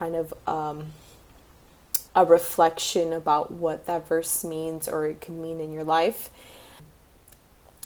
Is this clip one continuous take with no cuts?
no; 1 cut; at 2.1 s

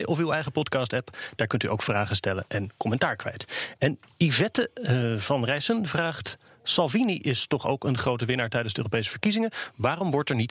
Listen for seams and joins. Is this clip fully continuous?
yes; 0 cuts

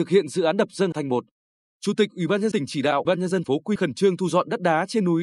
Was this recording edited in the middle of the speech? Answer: yes; 5 cuts; at 0.9 s, 2.5 s, 3.0 s, 3.4 s, 3.8 s

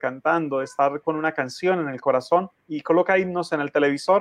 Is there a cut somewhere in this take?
no; 0 cuts

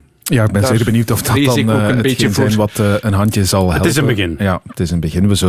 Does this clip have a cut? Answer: no; 0 cuts

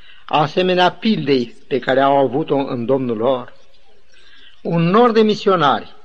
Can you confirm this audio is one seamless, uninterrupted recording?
yes; 0 cuts

